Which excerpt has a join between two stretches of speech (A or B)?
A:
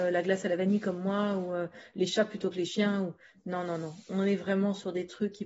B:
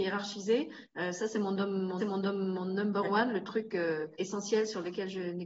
B